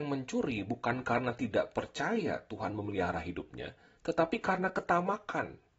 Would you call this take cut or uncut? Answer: uncut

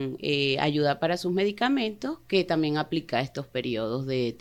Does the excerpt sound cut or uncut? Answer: uncut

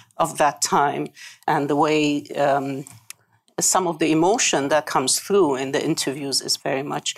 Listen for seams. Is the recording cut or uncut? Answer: cut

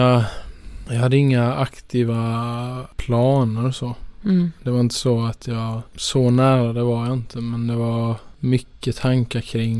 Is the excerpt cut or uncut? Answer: uncut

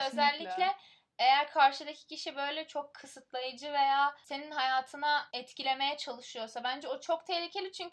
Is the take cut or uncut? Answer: uncut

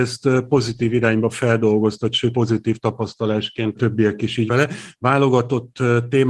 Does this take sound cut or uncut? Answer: cut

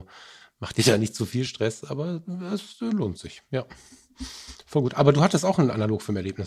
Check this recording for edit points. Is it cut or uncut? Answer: uncut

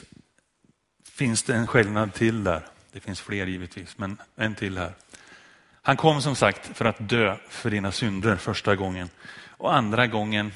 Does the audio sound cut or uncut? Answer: uncut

